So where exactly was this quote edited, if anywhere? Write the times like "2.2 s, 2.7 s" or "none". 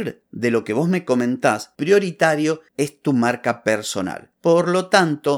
1.8 s